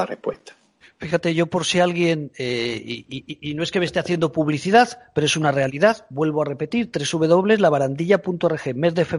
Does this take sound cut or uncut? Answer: uncut